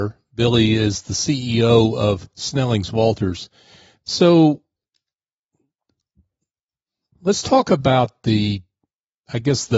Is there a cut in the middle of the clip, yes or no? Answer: no